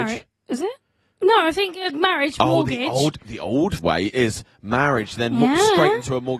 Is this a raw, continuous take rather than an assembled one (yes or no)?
no